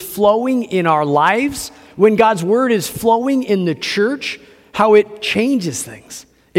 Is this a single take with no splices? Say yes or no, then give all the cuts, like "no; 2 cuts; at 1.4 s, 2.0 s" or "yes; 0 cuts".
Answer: yes; 0 cuts